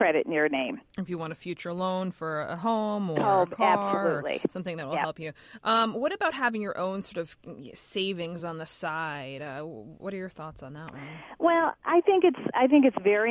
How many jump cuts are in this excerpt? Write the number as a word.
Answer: zero